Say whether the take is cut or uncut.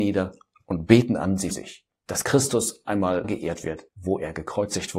cut